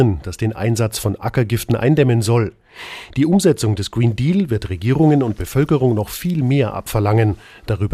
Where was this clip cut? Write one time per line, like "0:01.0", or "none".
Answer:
none

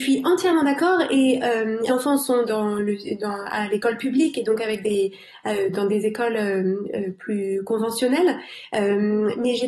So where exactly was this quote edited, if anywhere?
0:01.9
0:02.5
0:05.7

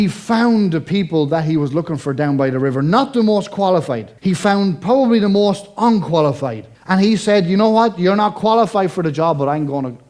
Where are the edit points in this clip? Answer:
0:04.2
0:06.7

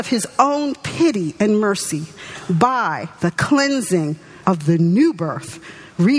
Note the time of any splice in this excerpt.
0:03.1
0:04.4

